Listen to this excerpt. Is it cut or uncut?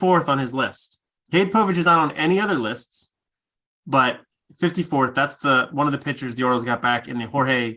uncut